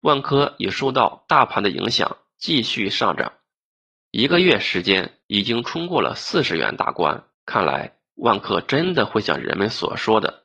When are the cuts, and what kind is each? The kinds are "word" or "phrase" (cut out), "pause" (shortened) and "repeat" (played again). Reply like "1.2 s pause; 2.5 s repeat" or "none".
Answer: 5.2 s pause; 7.3 s pause